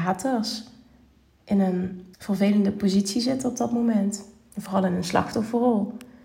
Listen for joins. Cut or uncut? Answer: cut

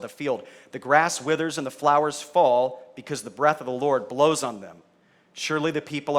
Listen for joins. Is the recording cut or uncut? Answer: uncut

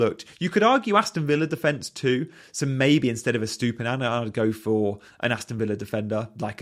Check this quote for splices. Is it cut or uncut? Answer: uncut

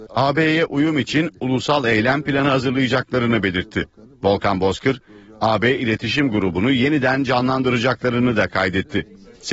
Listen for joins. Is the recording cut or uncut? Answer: uncut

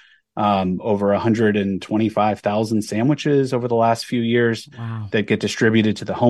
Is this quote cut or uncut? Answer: uncut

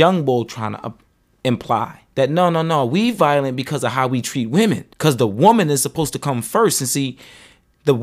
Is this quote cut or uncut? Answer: cut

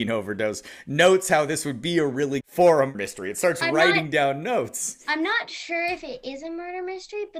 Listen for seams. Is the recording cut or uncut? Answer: cut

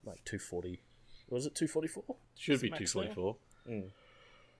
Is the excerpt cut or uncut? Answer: cut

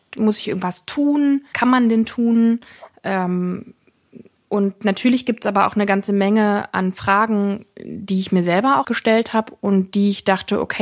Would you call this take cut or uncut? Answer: cut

